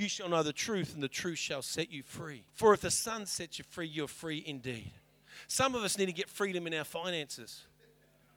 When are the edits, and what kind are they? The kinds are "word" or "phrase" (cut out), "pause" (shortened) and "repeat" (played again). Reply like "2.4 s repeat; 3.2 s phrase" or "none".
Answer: 2.5 s pause